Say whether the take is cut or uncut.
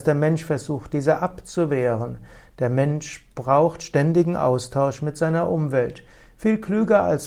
uncut